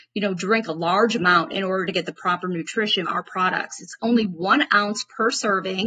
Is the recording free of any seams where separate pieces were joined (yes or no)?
no